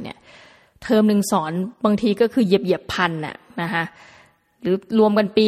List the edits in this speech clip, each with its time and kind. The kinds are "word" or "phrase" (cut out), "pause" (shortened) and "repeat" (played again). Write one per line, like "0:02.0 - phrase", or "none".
0:01.7 - pause